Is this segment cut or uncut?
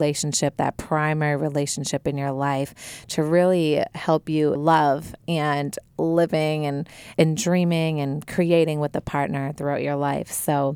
cut